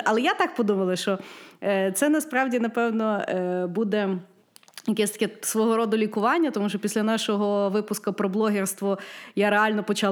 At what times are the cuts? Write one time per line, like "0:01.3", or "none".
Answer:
none